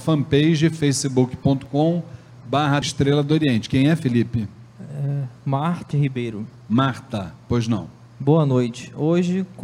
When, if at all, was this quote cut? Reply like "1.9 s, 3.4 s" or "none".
2.8 s, 5.9 s